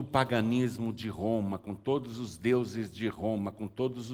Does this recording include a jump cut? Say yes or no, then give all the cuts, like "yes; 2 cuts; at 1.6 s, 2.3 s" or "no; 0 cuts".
no; 0 cuts